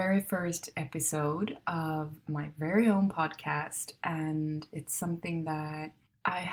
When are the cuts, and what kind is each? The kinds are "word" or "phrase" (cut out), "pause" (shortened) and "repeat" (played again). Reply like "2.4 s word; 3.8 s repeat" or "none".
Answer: none